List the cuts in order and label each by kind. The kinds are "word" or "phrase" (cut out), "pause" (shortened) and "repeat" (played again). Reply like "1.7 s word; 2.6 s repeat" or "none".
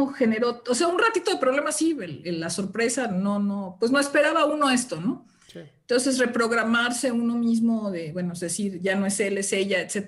none